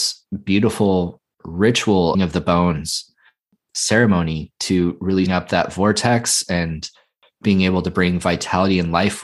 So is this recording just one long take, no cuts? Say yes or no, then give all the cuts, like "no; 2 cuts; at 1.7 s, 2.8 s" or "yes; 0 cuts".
no; 2 cuts; at 2.1 s, 5.3 s